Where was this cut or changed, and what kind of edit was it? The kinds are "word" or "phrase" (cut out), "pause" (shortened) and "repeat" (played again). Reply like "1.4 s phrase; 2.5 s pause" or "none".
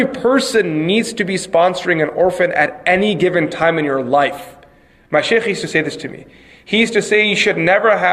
none

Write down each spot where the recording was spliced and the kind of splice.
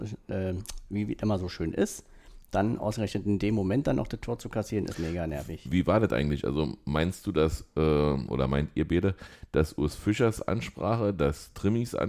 4.9 s word

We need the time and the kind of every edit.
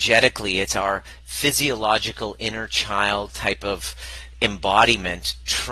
none

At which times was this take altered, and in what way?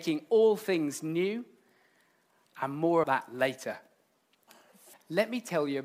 3.0 s word; 4.9 s word

